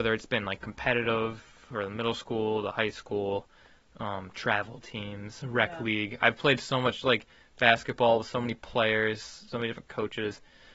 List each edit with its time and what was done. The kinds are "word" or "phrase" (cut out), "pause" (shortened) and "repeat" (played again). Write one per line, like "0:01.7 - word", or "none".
none

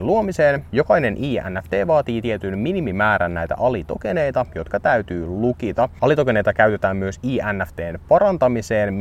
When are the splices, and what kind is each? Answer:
none

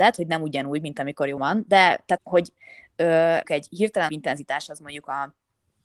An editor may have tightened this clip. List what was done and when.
0:01.4 - word
0:02.2 - word
0:03.4 - phrase
0:04.1 - word

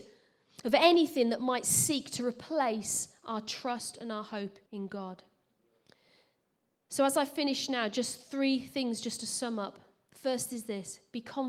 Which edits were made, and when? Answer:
0:04.7 - pause

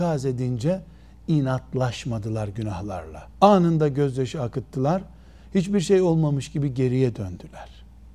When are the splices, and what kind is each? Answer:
0:03.3 - pause

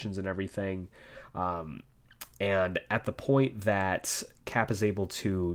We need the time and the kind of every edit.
none

